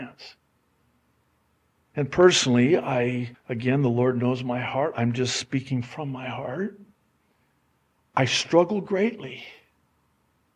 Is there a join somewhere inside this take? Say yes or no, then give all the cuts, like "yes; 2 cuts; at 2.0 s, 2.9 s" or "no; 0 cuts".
yes; 1 cut; at 3.3 s